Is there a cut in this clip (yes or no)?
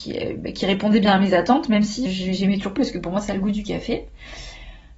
yes